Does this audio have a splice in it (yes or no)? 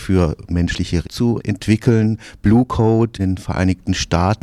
yes